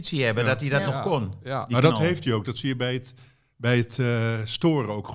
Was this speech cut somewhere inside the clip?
no; 0 cuts

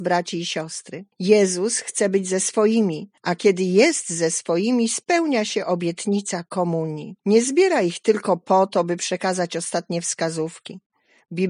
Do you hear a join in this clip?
yes; 3 cuts; at 1.1 s, 3.2 s, 7.2 s

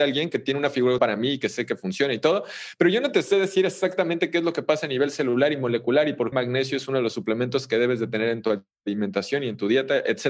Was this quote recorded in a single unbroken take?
no; 2 cuts; at 1.0 s, 6.3 s

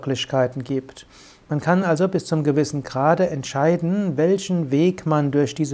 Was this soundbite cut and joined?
no; 0 cuts

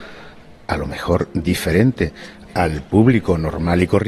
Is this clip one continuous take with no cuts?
yes; 0 cuts

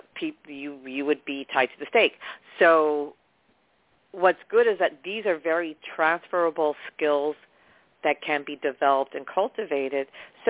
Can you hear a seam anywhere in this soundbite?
no; 0 cuts

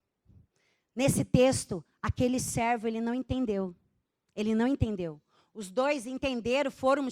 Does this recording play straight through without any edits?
yes; 0 cuts

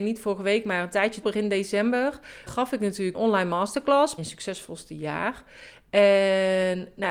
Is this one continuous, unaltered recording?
no; 4 cuts; at 1.2 s, 2.5 s, 3.1 s, 4.2 s

